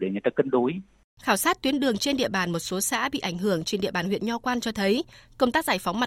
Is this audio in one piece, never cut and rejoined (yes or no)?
yes